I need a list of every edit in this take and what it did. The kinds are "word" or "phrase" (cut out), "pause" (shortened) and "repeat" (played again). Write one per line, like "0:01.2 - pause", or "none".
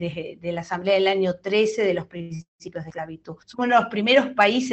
0:03.4 - pause